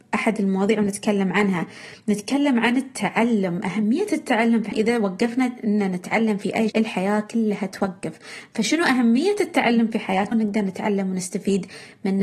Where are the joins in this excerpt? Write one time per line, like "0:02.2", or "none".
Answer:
0:04.7
0:06.7
0:10.3